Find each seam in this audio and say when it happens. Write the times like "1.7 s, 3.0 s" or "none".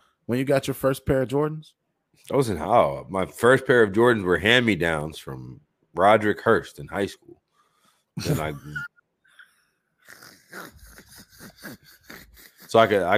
none